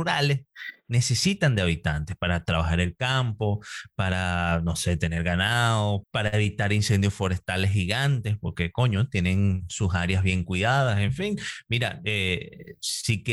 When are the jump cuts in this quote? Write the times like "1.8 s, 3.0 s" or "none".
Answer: 6.0 s